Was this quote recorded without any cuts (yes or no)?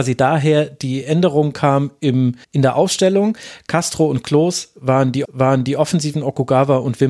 no